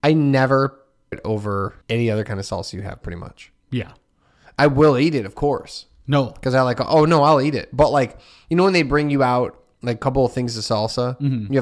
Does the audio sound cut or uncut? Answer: cut